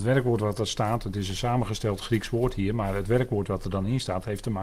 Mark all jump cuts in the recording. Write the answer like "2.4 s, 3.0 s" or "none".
none